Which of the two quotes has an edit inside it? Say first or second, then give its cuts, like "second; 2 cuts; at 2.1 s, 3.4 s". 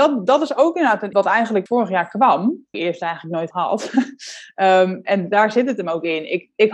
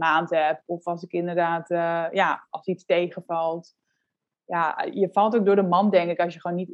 first; 4 cuts; at 1.1 s, 1.7 s, 2.7 s, 3.5 s